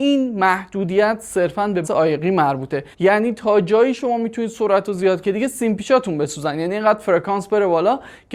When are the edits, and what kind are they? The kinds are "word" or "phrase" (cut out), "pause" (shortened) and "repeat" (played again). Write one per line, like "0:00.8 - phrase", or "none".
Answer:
0:01.8 - word
0:02.9 - pause
0:05.2 - word